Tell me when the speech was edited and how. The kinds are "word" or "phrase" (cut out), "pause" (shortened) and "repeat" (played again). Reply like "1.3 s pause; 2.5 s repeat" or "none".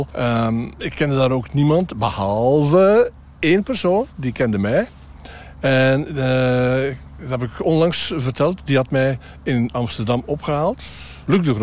none